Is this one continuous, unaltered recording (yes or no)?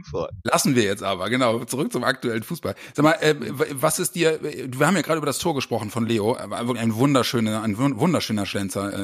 yes